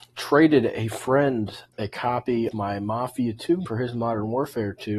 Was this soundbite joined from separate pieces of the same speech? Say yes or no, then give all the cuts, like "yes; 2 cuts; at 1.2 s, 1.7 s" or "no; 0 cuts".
yes; 3 cuts; at 1.7 s, 2.5 s, 3.6 s